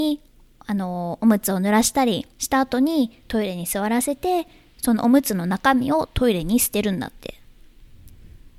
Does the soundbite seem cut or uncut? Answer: cut